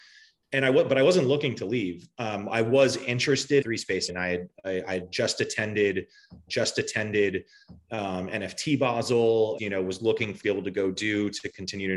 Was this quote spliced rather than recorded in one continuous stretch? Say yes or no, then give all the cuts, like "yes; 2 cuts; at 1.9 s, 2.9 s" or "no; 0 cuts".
yes; 5 cuts; at 3.6 s, 4.1 s, 6.5 s, 9.6 s, 10.4 s